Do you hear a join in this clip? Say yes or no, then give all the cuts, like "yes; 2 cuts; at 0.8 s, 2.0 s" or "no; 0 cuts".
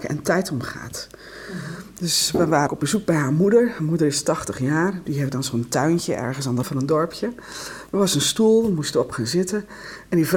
yes; 2 cuts; at 2.7 s, 6.6 s